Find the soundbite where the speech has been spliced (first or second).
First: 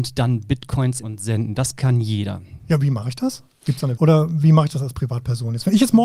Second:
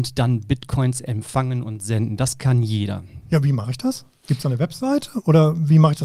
first